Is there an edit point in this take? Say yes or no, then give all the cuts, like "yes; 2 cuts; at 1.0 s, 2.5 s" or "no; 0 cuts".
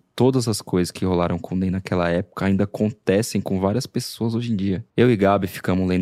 yes; 1 cut; at 4.9 s